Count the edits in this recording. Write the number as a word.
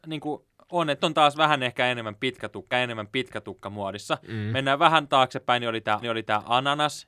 three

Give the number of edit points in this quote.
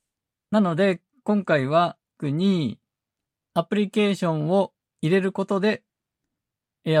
one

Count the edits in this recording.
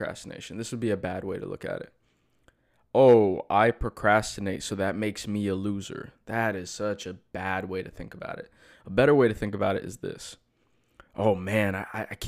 zero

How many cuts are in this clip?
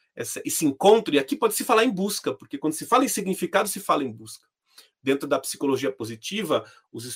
zero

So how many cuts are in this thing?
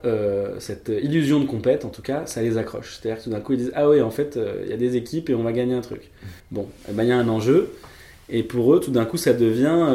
one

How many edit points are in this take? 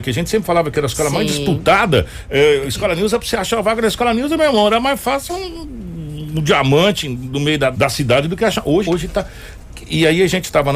three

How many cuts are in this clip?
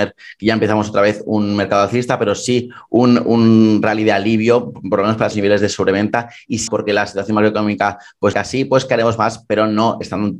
three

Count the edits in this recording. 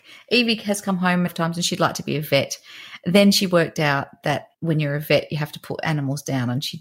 two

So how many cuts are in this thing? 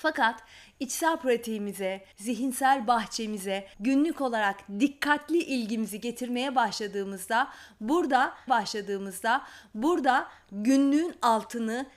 three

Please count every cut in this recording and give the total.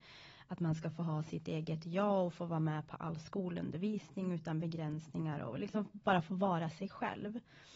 zero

